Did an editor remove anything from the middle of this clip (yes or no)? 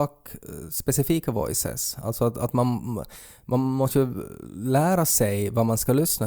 no